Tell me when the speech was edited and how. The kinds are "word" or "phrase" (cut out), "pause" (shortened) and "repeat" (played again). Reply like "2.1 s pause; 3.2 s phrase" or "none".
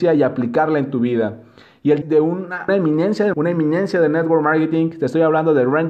2.0 s phrase; 2.7 s word; 3.3 s word